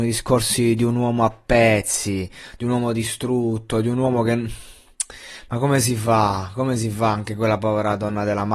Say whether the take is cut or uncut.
uncut